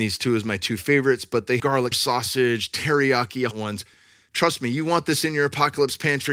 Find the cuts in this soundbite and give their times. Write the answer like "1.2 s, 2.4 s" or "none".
1.6 s, 1.9 s, 3.5 s